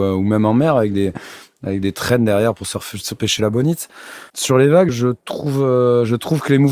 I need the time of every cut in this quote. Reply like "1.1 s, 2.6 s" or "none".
3.2 s, 4.3 s, 4.9 s